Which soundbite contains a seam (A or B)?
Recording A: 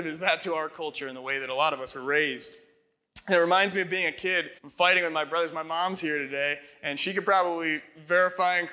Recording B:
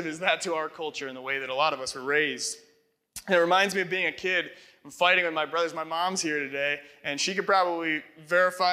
A